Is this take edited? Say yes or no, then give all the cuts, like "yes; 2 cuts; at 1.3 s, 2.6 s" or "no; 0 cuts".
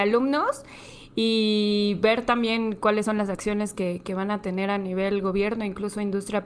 no; 0 cuts